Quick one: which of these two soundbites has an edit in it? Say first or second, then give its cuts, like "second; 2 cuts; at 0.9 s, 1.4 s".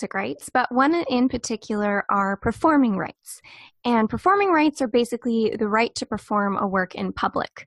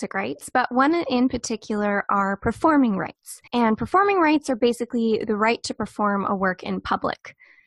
second; 1 cut; at 3.5 s